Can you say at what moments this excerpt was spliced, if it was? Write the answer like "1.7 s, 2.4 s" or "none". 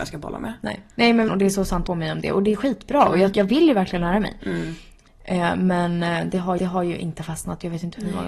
0.9 s, 1.3 s, 1.9 s, 3.3 s, 6.6 s